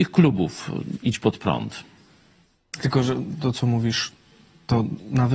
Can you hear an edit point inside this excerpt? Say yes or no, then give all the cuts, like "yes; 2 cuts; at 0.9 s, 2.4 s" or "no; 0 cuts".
no; 0 cuts